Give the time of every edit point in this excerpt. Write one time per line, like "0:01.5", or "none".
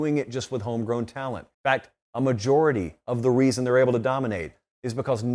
0:01.5